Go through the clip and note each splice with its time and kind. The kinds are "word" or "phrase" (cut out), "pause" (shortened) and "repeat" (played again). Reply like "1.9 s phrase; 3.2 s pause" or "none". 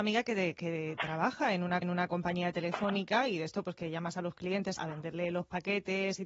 1.8 s repeat; 4.8 s word